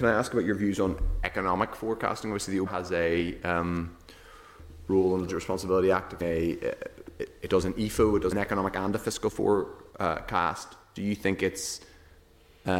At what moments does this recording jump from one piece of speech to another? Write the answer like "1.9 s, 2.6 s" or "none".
2.7 s, 5.3 s, 6.2 s, 8.3 s